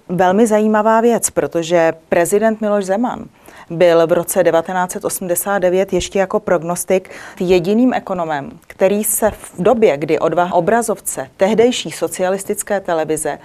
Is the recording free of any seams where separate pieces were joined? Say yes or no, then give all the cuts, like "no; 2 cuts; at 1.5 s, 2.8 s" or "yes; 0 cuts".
no; 2 cuts; at 7.3 s, 10.5 s